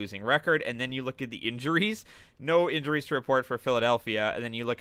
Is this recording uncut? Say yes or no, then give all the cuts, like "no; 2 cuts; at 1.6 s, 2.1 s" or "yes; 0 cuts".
yes; 0 cuts